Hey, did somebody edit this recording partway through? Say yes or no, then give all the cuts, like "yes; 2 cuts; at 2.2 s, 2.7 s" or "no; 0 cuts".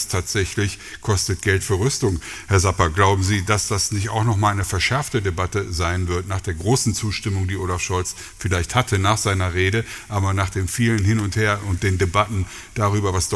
no; 0 cuts